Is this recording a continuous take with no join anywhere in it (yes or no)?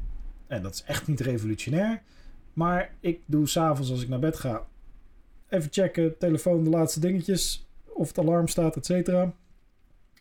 yes